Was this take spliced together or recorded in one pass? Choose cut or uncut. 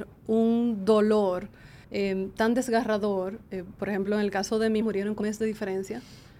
cut